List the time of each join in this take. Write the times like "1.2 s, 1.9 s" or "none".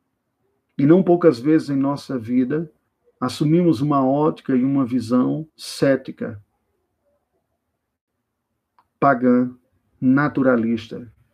2.9 s, 5.5 s, 9.6 s

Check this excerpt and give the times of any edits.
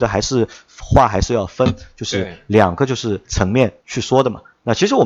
3.2 s, 3.8 s

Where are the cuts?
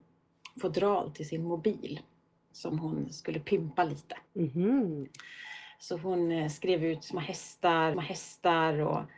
2.5 s, 4.3 s, 7.9 s

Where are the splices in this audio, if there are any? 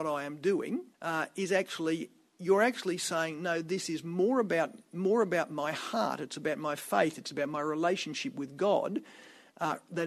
0.9 s

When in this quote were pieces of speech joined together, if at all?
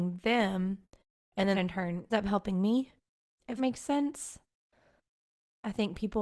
1.5 s, 2.1 s, 3.6 s

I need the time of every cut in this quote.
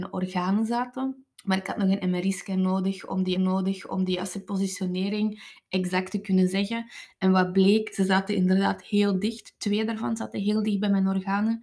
1.3 s, 3.4 s

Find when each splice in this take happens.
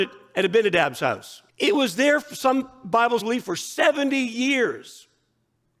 1.5 s, 3.2 s

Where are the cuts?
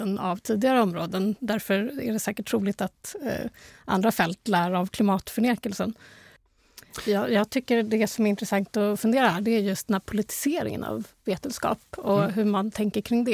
none

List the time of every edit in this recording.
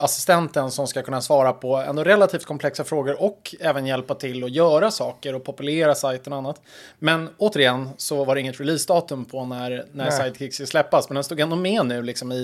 none

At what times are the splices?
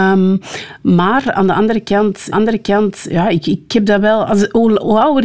2.3 s

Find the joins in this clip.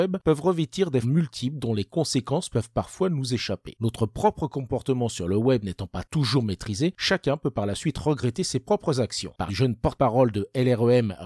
1.0 s, 9.5 s

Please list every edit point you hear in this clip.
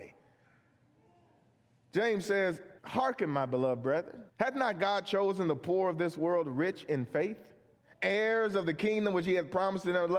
2.8 s, 4.3 s, 7.8 s

